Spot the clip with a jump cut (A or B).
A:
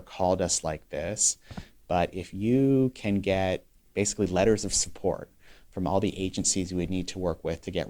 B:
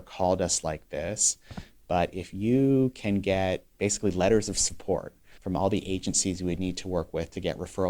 B